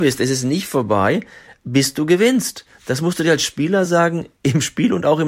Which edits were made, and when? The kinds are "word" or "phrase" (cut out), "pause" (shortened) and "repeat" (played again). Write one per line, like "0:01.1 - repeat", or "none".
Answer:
none